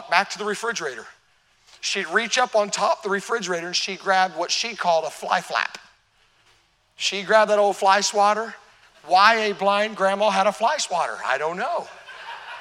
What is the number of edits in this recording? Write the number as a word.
zero